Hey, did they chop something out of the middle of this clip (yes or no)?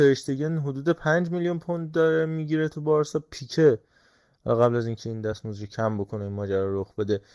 no